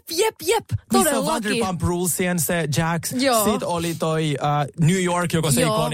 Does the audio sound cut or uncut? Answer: uncut